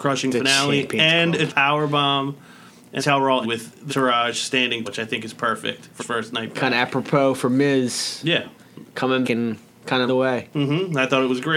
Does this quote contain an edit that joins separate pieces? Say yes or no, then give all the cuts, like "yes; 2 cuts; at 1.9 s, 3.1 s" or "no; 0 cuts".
yes; 8 cuts; at 1.5 s, 3.0 s, 3.4 s, 3.9 s, 4.8 s, 6.0 s, 9.2 s, 10.1 s